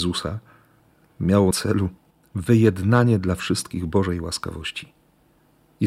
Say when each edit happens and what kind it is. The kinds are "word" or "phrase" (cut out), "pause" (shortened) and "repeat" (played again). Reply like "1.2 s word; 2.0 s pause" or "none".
1.5 s word